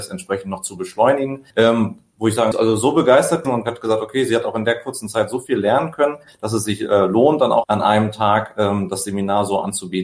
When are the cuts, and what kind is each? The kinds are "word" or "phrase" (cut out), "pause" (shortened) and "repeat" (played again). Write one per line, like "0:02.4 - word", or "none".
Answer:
0:01.5 - pause
0:02.5 - phrase
0:03.4 - word
0:07.6 - phrase